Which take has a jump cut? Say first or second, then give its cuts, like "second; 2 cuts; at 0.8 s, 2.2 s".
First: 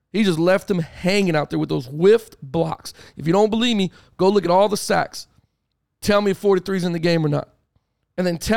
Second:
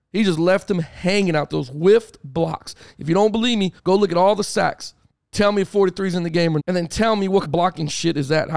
second; 5 cuts; at 1.5 s, 3.8 s, 5.1 s, 6.6 s, 7.4 s